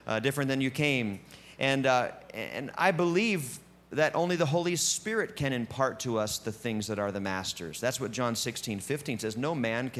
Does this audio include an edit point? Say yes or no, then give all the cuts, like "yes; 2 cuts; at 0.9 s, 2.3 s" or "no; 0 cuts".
no; 0 cuts